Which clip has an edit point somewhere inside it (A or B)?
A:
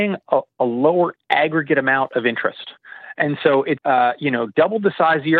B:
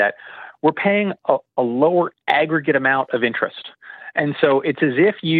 A